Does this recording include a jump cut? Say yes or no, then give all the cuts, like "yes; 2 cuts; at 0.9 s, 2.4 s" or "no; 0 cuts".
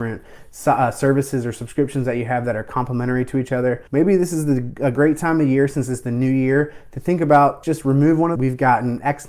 yes; 3 cuts; at 3.9 s, 7.6 s, 8.4 s